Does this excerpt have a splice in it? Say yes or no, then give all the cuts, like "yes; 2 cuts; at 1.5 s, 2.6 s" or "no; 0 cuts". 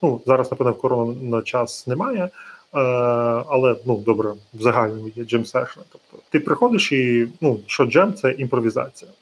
yes; 1 cut; at 6.3 s